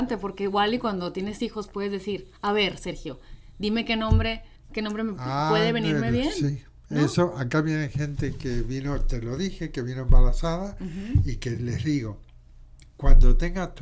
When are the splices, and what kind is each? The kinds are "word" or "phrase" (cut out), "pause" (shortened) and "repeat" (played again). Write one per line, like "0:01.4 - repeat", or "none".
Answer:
0:04.6 - pause